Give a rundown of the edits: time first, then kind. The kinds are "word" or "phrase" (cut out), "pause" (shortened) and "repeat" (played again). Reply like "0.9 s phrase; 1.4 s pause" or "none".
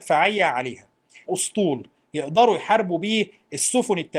1.3 s phrase